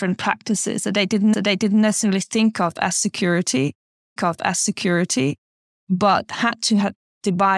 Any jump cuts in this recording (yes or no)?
yes